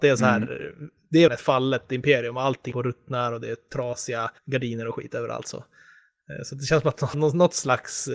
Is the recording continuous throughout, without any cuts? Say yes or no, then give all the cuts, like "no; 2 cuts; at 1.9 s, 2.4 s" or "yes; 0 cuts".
no; 4 cuts; at 1.3 s, 2.7 s, 4.4 s, 7.1 s